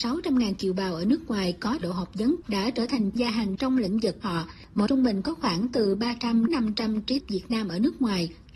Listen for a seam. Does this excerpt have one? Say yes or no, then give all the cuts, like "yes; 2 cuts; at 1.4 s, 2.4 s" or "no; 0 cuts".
yes; 8 cuts; at 1.8 s, 2.4 s, 3.2 s, 3.6 s, 4.2 s, 4.9 s, 6.5 s, 7.2 s